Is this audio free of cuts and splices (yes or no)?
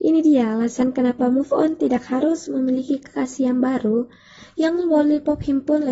yes